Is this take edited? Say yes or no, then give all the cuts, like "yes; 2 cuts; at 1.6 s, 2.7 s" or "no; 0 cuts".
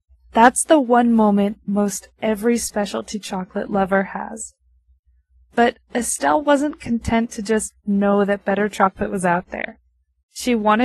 no; 0 cuts